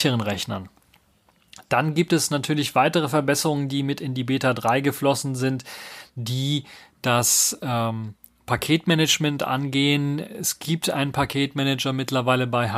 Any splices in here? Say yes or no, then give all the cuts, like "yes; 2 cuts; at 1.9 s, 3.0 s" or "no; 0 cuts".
no; 0 cuts